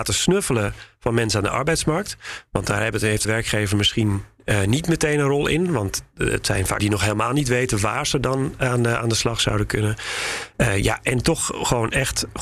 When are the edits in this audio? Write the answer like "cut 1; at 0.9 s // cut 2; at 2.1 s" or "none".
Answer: cut 1; at 3.2 s // cut 2; at 6.8 s